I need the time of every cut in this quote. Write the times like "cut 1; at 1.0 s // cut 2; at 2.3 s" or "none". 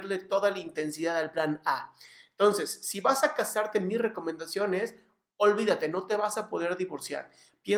none